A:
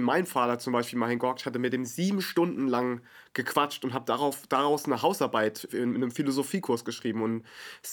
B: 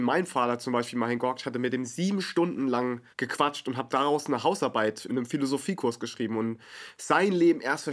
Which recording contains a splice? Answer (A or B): B